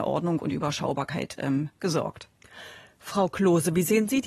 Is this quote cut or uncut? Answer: uncut